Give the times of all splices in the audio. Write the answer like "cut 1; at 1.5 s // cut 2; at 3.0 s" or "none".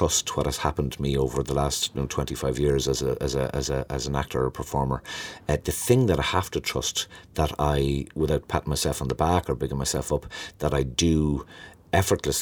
none

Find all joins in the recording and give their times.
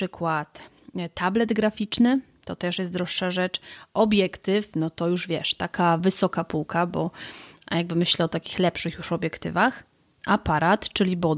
none

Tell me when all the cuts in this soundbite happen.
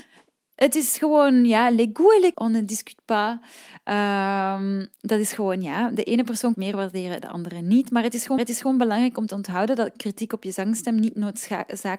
cut 1; at 2.3 s // cut 2; at 4.9 s // cut 3; at 6.5 s // cut 4; at 8.4 s

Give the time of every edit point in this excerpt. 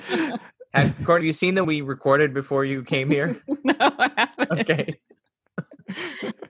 cut 1; at 1.2 s // cut 2; at 1.6 s

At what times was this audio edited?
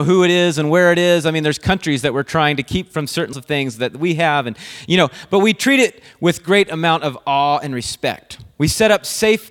cut 1; at 3.3 s

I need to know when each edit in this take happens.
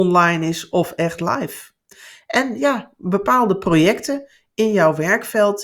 none

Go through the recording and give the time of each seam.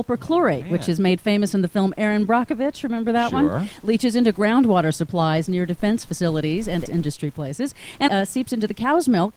cut 1; at 6.9 s // cut 2; at 8.1 s

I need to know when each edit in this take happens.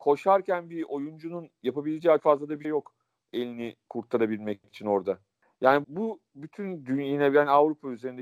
cut 1; at 2.2 s // cut 2; at 2.6 s // cut 3; at 5.8 s

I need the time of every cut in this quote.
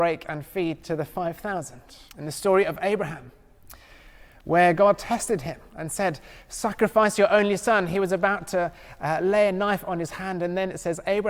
cut 1; at 2.1 s // cut 2; at 5.7 s

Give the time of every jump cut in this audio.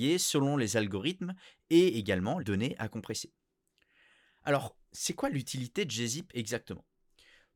cut 1; at 2.4 s // cut 2; at 4.8 s

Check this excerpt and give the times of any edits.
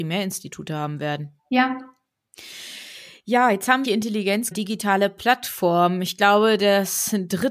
cut 1; at 1.4 s // cut 2; at 3.8 s // cut 3; at 4.5 s

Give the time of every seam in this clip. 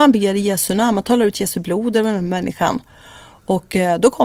none

